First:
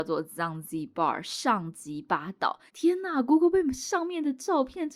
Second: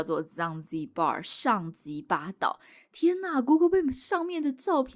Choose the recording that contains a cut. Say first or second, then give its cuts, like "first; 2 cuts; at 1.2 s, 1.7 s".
first; 1 cut; at 2.7 s